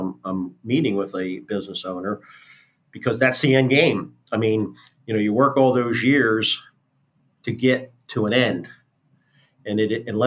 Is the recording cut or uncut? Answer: uncut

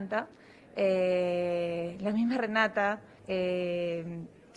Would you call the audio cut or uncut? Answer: cut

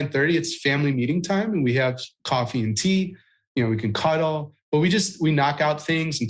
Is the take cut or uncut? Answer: uncut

